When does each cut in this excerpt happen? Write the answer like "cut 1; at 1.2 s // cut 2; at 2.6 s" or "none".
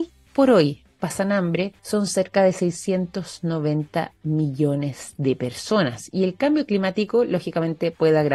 cut 1; at 1.8 s